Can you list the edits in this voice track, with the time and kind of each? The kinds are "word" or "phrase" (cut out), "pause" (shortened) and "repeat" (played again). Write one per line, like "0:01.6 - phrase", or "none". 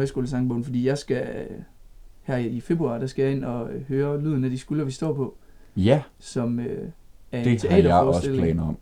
none